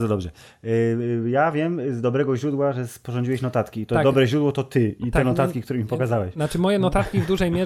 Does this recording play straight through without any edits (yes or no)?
yes